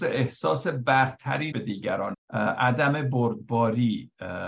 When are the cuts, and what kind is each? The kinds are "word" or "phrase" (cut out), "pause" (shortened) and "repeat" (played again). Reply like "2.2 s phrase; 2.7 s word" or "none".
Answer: 1.5 s word; 2.1 s word